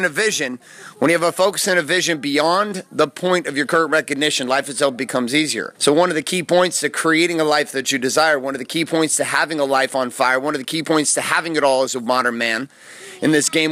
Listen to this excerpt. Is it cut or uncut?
cut